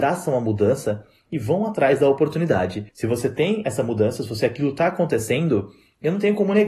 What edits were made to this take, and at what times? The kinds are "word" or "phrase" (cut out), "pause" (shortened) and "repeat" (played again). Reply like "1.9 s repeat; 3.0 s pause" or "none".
2.9 s pause